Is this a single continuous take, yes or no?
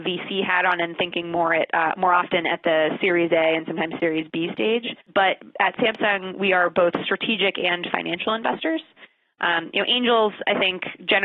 no